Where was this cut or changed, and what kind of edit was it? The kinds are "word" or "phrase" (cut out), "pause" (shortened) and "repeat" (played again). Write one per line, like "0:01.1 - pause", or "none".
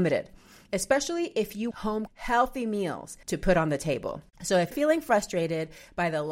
0:01.7 - phrase
0:02.1 - word
0:03.2 - pause
0:04.7 - word